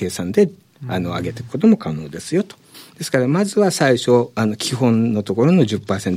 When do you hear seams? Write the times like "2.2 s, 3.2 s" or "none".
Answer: 2.7 s